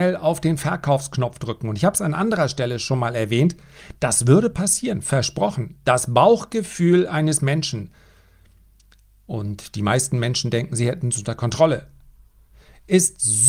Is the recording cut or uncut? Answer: uncut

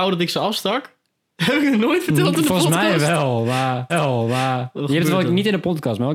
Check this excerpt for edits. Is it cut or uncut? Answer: cut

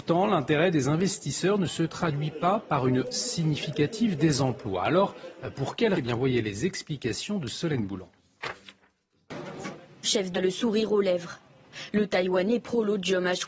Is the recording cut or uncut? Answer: cut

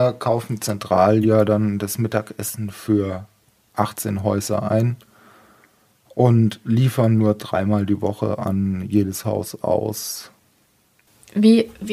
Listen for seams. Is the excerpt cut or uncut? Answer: uncut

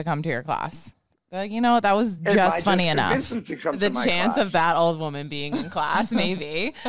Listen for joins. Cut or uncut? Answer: uncut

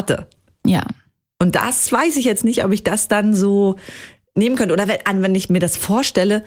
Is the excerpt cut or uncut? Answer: uncut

